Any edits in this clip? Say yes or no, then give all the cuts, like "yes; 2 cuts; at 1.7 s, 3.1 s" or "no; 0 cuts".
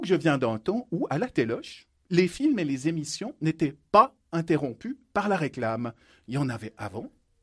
no; 0 cuts